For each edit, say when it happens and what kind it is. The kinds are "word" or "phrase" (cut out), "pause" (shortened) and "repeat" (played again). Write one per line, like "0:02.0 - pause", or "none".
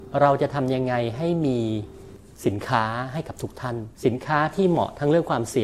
0:03.9 - pause